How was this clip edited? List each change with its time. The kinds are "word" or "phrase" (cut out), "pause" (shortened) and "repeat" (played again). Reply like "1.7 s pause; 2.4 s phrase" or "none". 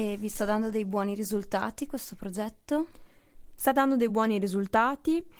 none

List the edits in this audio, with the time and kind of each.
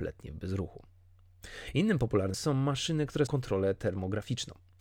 2.3 s word; 3.3 s word

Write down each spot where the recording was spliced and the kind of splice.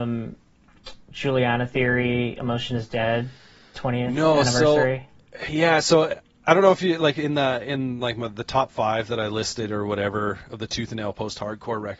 none

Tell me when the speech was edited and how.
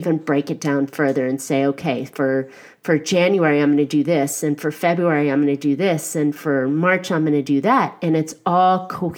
none

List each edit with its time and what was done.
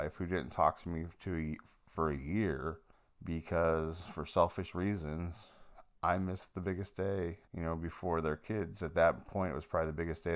2.9 s pause; 7.5 s pause

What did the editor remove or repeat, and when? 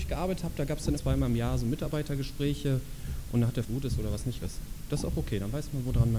1.0 s phrase; 3.6 s phrase; 4.4 s word

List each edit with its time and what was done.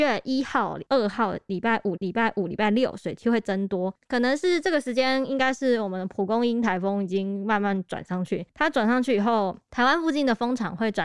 2.0 s repeat

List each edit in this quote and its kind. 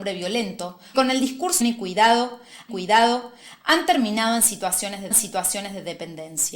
0.9 s word; 1.6 s phrase; 2.7 s repeat; 5.1 s repeat

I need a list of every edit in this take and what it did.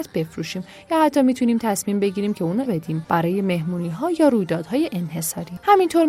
2.7 s word

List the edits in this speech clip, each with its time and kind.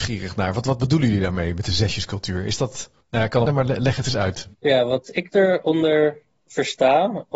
3.0 s pause; 3.5 s phrase; 4.5 s pause

